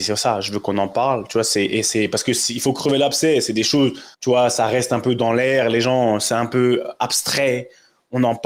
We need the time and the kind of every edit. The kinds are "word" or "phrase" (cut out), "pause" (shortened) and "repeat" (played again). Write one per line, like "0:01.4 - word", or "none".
0:04.1 - pause